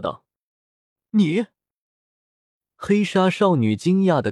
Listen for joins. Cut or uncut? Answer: uncut